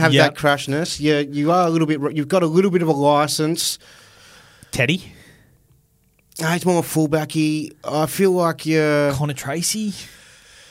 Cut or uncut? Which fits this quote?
uncut